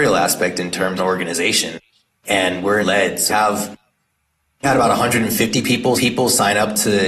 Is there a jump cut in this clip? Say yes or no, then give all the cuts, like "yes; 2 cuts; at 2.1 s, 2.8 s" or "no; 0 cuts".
yes; 5 cuts; at 1.0 s, 2.8 s, 3.3 s, 4.6 s, 6.0 s